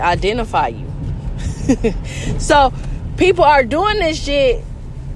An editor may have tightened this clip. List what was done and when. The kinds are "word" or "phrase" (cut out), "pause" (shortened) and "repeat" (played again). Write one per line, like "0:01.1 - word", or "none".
none